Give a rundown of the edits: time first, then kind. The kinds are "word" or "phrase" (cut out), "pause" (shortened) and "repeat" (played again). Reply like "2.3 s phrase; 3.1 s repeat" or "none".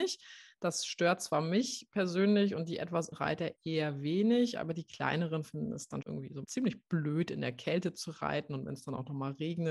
3.1 s word; 6.0 s word; 6.4 s word